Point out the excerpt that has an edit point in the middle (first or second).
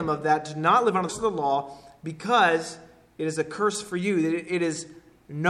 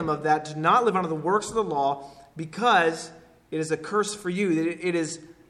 first